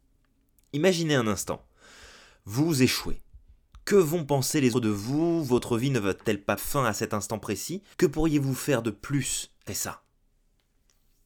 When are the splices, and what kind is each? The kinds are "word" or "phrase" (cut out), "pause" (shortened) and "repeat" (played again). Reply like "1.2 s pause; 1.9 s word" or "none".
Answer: 4.7 s word; 6.6 s word; 7.9 s pause; 9.7 s word